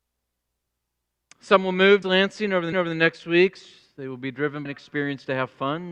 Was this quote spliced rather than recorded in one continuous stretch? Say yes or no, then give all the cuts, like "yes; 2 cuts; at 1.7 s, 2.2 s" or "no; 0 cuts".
yes; 3 cuts; at 2.0 s, 2.7 s, 4.7 s